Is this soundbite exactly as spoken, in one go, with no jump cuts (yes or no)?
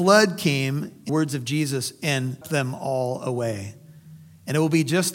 no